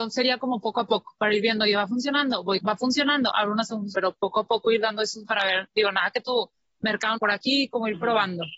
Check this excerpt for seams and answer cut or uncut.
cut